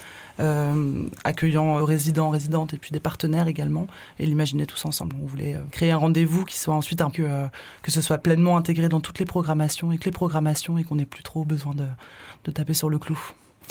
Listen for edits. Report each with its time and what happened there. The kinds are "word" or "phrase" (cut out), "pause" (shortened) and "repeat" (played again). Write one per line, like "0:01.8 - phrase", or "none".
0:01.8 - phrase
0:05.7 - word
0:06.5 - word
0:07.1 - phrase
0:10.0 - repeat